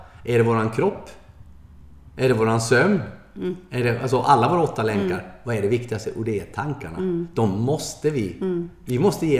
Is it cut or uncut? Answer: uncut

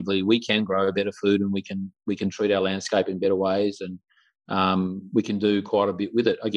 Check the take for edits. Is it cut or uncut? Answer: uncut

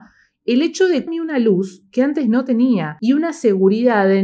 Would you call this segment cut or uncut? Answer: cut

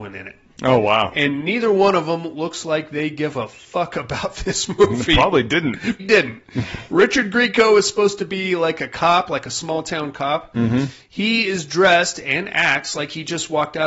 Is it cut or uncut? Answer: cut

